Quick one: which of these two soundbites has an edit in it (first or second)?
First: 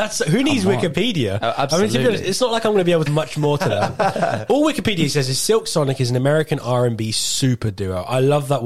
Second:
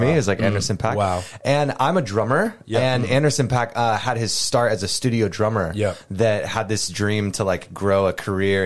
first